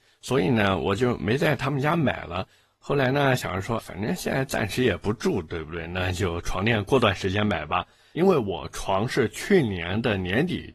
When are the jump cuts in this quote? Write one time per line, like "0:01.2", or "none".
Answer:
0:03.8